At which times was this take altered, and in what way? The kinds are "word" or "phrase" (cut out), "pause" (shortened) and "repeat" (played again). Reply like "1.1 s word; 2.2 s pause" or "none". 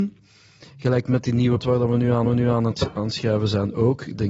1.6 s word; 2.3 s repeat